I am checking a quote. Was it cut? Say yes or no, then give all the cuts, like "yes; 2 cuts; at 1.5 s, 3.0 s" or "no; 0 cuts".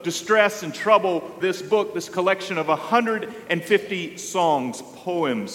yes; 1 cut; at 1.4 s